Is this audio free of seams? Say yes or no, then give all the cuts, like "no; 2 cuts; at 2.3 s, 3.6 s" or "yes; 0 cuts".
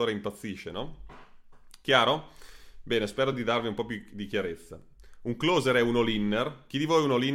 yes; 0 cuts